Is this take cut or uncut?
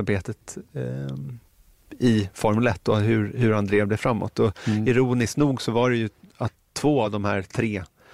uncut